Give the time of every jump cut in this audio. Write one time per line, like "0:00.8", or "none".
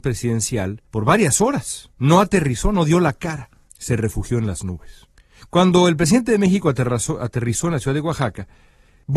none